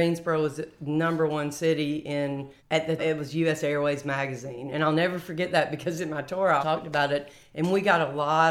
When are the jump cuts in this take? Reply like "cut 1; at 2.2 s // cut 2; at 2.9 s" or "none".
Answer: cut 1; at 2.6 s // cut 2; at 3.0 s // cut 3; at 6.6 s